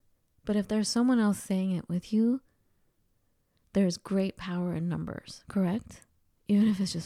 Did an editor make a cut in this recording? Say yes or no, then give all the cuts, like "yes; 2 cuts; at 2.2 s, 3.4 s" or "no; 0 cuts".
no; 0 cuts